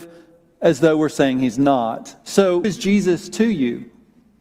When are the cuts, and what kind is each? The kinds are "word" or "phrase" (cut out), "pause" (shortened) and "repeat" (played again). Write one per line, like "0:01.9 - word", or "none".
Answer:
0:02.6 - word